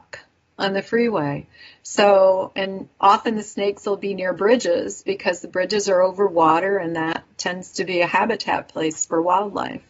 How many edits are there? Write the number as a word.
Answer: zero